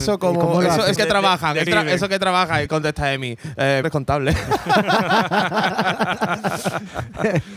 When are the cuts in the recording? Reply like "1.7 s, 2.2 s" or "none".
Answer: 1.0 s, 1.7 s, 2.7 s, 3.8 s